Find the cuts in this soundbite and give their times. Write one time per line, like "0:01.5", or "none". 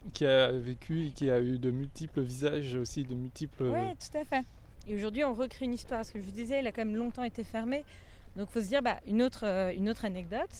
none